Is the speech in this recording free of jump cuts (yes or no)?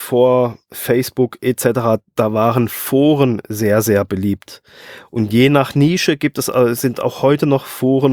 yes